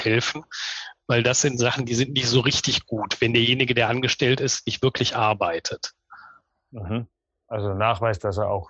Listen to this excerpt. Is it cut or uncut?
uncut